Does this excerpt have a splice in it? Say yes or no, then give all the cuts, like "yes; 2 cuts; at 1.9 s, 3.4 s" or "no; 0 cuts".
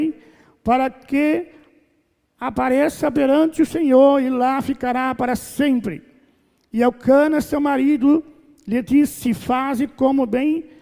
no; 0 cuts